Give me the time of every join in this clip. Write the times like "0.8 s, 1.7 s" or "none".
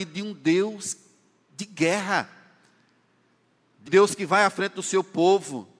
3.9 s